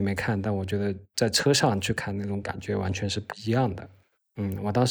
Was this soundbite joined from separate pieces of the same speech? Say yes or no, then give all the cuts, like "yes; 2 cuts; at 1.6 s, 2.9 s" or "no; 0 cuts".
no; 0 cuts